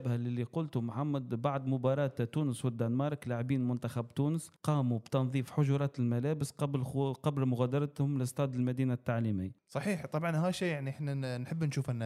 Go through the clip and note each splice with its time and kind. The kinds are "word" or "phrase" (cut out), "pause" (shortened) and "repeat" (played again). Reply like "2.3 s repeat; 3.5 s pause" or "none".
4.6 s pause; 9.6 s pause